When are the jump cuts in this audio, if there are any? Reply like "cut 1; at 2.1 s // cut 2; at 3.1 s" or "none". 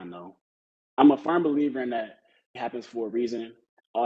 cut 1; at 2.6 s